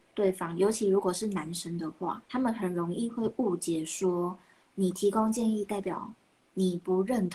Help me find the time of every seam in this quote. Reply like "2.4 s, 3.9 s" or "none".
2.2 s